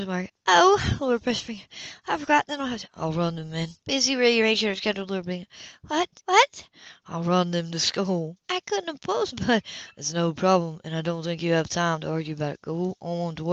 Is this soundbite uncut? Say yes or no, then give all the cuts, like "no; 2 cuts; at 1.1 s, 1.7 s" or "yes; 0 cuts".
no; 3 cuts; at 3.8 s, 6.2 s, 8.4 s